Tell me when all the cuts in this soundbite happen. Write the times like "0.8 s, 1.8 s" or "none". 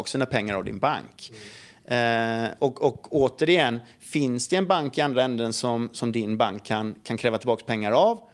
none